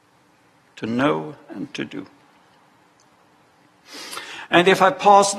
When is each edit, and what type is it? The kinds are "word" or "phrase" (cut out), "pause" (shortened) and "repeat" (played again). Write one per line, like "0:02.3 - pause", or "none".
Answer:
none